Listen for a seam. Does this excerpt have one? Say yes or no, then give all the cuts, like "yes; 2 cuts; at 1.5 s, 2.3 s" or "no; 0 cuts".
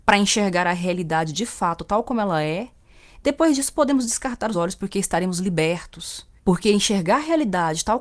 yes; 2 cuts; at 4.5 s, 6.4 s